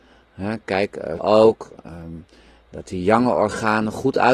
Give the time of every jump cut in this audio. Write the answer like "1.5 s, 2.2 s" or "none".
1.2 s

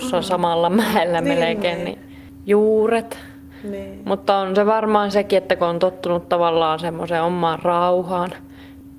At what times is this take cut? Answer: 5.1 s

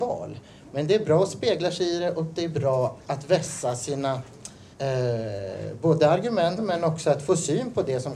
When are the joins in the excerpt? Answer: 4.7 s, 6.6 s

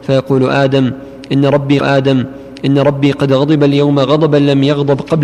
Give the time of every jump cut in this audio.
1.8 s

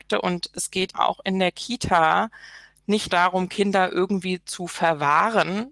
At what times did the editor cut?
0.9 s, 3.1 s

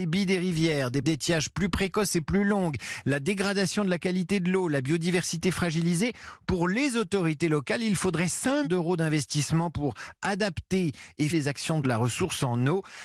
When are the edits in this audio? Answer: 1.0 s, 8.6 s, 11.3 s, 11.8 s

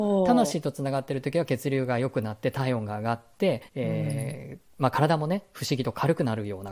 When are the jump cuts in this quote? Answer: 3.7 s

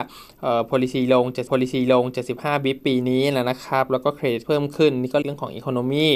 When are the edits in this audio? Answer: 1.5 s, 4.4 s, 5.2 s

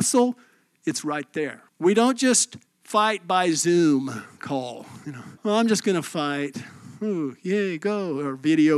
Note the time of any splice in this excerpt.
1.7 s, 2.7 s, 5.4 s

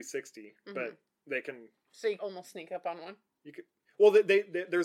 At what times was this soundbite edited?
2.2 s

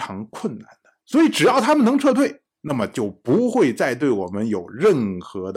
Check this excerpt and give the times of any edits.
1.0 s, 2.5 s

